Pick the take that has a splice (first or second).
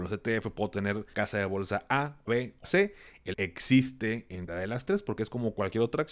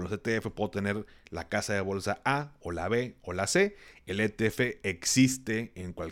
first